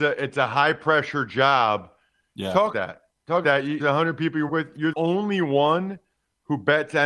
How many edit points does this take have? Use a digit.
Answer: 5